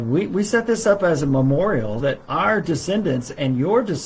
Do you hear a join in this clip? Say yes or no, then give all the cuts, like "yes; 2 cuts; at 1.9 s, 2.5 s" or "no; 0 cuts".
yes; 1 cut; at 2.0 s